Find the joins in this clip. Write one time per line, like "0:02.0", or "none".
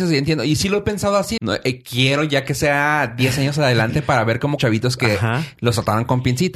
0:01.4
0:04.6